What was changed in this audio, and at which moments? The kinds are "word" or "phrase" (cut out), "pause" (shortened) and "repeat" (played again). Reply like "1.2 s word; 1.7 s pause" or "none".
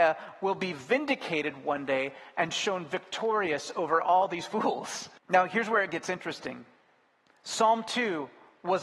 5.2 s pause